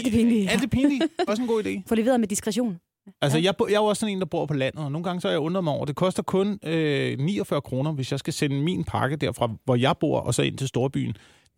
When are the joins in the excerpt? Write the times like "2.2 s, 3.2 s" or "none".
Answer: 1.3 s